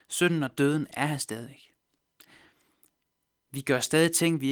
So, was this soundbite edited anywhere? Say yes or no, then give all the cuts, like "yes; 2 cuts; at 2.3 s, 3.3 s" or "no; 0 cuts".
no; 0 cuts